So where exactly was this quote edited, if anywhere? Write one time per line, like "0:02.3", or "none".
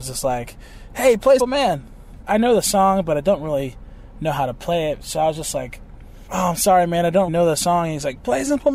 0:01.4
0:07.3